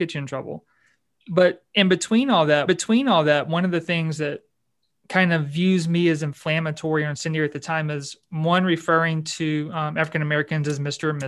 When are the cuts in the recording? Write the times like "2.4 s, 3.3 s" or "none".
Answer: 2.7 s